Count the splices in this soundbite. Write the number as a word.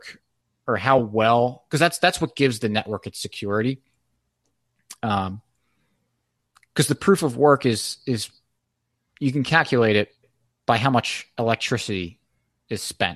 zero